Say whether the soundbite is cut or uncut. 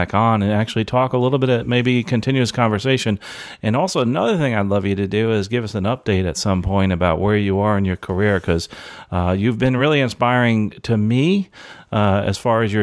uncut